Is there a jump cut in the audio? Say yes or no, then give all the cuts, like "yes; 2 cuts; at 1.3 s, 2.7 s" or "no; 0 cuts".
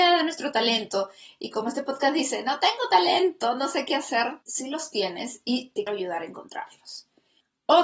yes; 2 cuts; at 4.4 s, 5.9 s